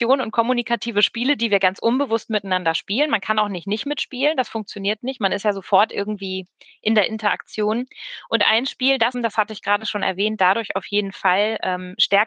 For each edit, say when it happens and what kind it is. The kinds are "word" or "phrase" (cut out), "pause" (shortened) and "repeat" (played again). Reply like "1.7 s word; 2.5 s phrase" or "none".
9.1 s word